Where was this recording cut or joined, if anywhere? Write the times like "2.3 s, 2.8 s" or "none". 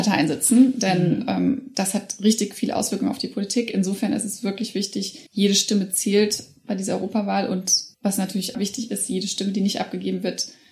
5.3 s, 7.9 s, 8.5 s